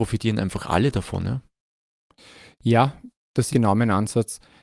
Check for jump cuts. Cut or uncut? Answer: cut